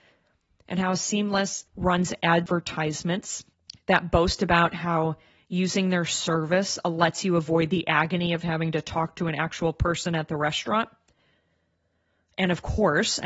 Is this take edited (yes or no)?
yes